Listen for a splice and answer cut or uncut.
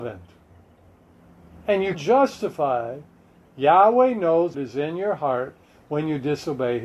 cut